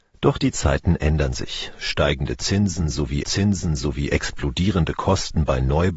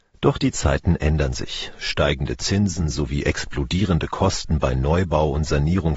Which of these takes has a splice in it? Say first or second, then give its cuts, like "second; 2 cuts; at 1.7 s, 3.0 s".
first; 1 cut; at 3.2 s